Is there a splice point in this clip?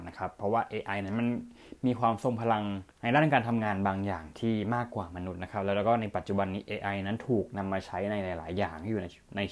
yes; 1 cut; at 2.9 s

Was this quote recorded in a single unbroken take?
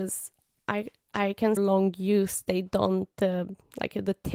no; 1 cut; at 1.6 s

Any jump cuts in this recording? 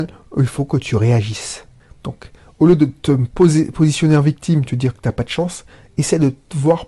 no; 0 cuts

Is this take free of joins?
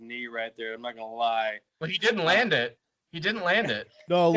yes; 0 cuts

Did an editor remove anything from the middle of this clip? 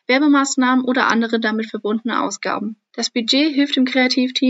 no; 0 cuts

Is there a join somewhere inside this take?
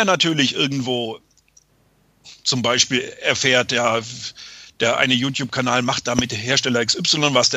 no; 0 cuts

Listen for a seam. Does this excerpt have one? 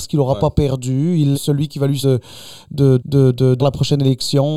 yes; 4 cuts; at 1.3 s, 2.0 s, 3.0 s, 3.6 s

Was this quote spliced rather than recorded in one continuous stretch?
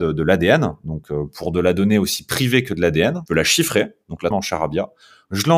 yes; 2 cuts; at 3.3 s, 4.3 s

